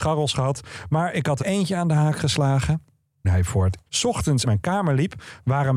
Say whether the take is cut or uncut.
cut